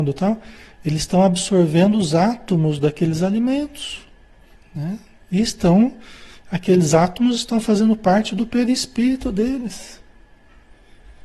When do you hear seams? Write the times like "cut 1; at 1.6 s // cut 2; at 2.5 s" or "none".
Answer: cut 1; at 4.6 s